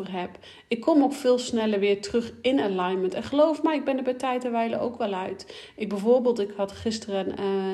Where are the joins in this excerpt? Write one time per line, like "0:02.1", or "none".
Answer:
none